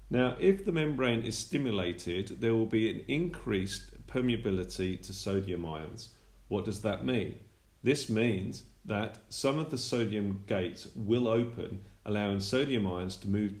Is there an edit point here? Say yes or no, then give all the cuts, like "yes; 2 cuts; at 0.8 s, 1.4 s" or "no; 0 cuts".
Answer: no; 0 cuts